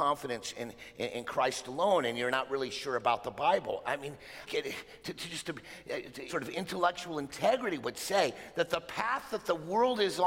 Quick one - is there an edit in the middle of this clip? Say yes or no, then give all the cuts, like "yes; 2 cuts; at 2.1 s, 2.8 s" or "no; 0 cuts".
yes; 2 cuts; at 4.5 s, 6.3 s